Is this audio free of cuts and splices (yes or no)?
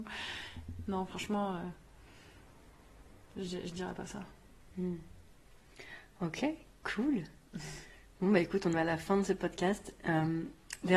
no